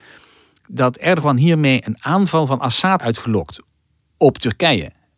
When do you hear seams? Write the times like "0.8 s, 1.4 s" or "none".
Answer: 3.0 s